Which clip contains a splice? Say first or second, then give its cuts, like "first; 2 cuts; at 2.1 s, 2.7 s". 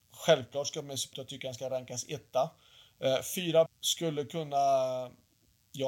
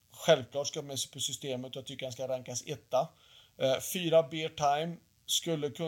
first; 2 cuts; at 1.1 s, 3.7 s